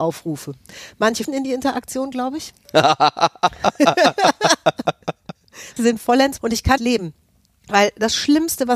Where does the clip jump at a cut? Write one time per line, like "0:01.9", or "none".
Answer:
0:01.2
0:05.8
0:06.4
0:06.8

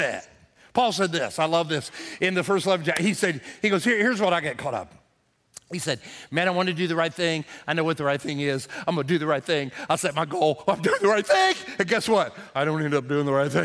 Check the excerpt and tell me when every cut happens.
none

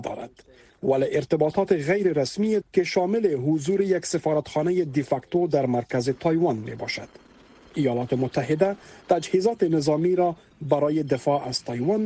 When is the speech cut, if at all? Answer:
0:02.6
0:09.0

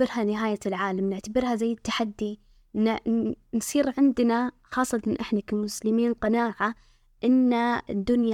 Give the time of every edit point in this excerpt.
none

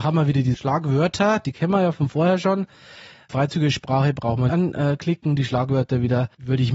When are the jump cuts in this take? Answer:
0:04.5

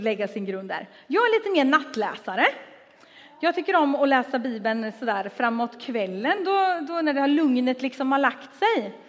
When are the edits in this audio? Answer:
none

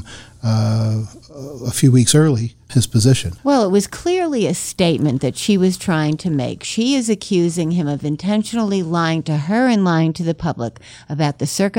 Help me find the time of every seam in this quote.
0:02.7
0:03.4

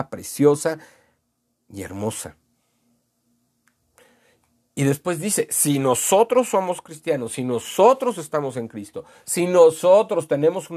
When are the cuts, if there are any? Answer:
none

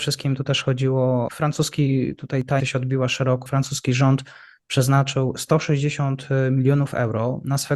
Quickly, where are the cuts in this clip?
0:01.3
0:02.6
0:03.5

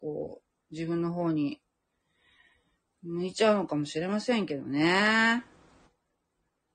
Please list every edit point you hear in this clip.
none

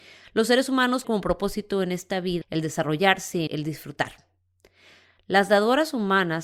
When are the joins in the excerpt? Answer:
0:01.0
0:02.4
0:03.5

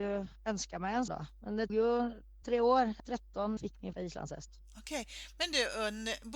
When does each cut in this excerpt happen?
0:01.1
0:01.7
0:02.4
0:03.0
0:03.6
0:03.9

